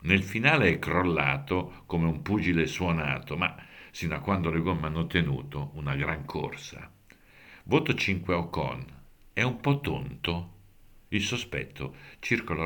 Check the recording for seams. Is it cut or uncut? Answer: uncut